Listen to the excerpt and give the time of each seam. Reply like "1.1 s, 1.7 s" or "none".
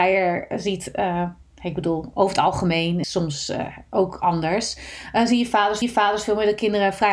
3.0 s, 5.8 s